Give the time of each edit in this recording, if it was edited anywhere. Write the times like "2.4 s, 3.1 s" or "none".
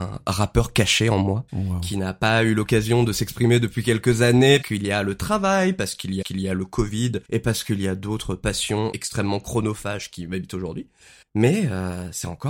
1.5 s, 4.6 s, 6.2 s, 7.2 s, 8.9 s, 11.2 s